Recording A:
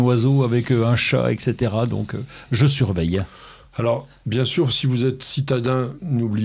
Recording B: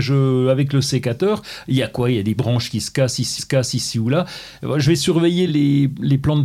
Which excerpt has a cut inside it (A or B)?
B